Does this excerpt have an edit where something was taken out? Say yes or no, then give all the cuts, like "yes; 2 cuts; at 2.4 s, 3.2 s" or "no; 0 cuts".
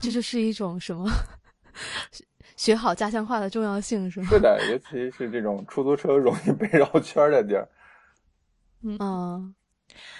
no; 0 cuts